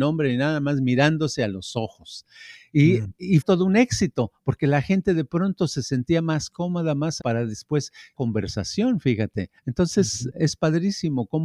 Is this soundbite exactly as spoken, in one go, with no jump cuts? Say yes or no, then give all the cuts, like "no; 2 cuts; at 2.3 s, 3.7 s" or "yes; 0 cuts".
no; 4 cuts; at 3.4 s, 7.2 s, 8.1 s, 9.6 s